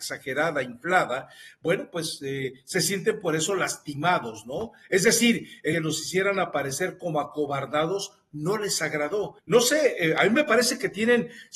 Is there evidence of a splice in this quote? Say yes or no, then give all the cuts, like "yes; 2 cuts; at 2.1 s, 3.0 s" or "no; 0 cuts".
yes; 2 cuts; at 5.7 s, 9.4 s